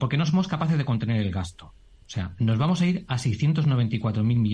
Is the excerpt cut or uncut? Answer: uncut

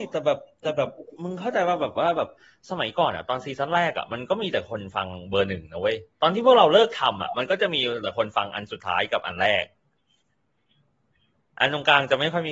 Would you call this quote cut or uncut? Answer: uncut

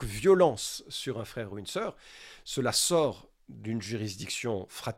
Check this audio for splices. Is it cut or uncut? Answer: uncut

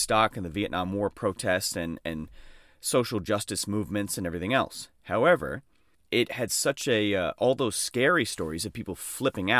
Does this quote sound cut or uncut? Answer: uncut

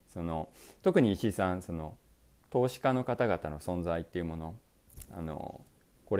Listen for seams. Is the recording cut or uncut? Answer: uncut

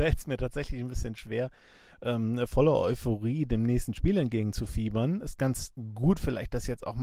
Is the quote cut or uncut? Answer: uncut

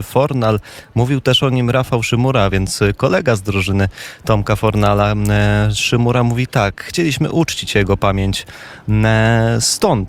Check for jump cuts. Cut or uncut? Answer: uncut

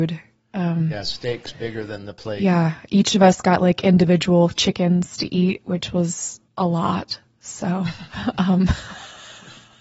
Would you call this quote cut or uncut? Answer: cut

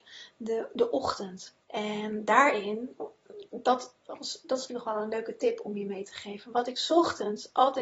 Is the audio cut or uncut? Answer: cut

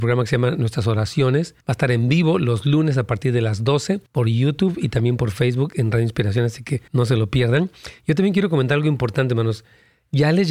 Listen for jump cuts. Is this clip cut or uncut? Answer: cut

